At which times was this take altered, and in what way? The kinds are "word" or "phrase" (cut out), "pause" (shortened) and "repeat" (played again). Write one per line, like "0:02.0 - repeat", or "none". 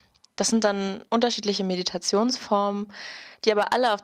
none